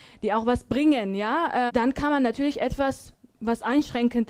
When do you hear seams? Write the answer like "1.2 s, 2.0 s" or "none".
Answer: 1.7 s